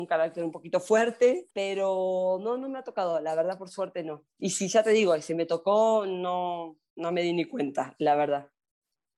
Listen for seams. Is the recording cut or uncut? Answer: cut